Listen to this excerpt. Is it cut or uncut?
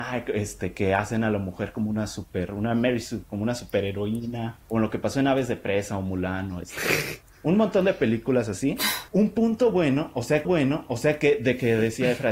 cut